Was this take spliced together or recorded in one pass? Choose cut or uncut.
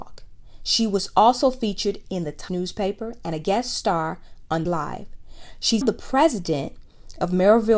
cut